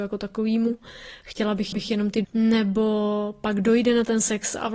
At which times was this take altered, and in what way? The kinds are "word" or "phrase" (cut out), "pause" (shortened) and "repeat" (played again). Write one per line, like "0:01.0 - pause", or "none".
0:01.7 - repeat
0:02.2 - word